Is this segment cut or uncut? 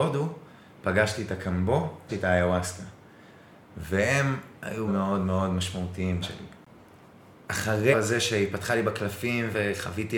cut